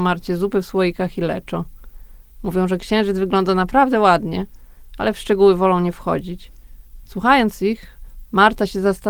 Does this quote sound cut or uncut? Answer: uncut